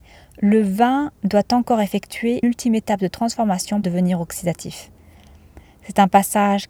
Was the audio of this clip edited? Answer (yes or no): yes